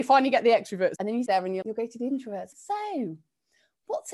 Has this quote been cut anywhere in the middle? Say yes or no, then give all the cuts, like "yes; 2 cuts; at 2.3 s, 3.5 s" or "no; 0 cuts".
yes; 4 cuts; at 1.0 s, 1.3 s, 1.6 s, 2.5 s